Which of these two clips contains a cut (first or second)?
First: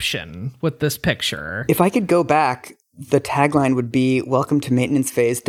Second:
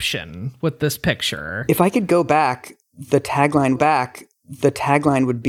second